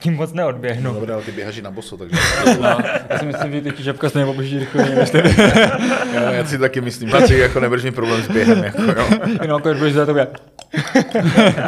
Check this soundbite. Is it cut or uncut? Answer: cut